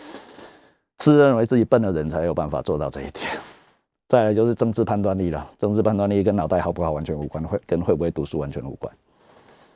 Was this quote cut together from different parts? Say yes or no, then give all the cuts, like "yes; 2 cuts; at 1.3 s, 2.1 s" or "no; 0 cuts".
no; 0 cuts